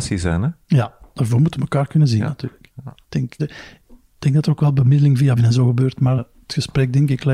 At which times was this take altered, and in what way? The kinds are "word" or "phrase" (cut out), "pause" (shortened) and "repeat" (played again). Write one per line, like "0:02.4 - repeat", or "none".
0:03.0 - pause
0:03.4 - word
0:05.4 - word
0:06.2 - word